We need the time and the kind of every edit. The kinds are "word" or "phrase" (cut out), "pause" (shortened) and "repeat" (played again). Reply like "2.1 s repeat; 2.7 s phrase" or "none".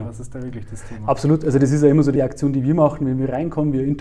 2.2 s word